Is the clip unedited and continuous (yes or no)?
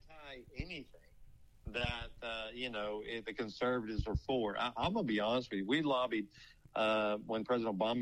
yes